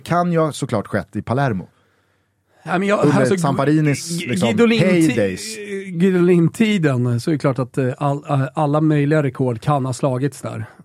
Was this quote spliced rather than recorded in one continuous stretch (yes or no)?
no